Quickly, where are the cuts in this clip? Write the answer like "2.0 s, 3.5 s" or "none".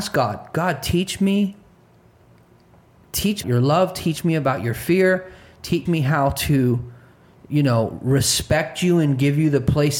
3.4 s, 5.9 s